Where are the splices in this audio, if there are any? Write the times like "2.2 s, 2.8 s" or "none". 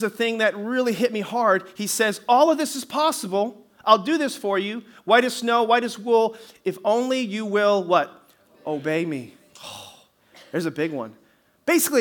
none